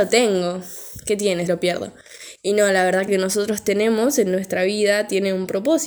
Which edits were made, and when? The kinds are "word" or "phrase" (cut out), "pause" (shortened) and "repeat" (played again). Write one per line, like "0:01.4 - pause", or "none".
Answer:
0:01.5 - word
0:03.1 - phrase